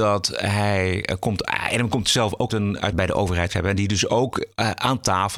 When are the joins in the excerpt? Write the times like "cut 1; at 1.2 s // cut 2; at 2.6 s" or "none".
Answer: cut 1; at 2.5 s // cut 2; at 2.9 s // cut 3; at 3.5 s